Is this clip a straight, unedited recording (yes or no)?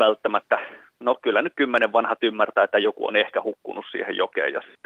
yes